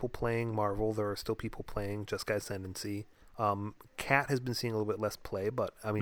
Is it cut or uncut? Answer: cut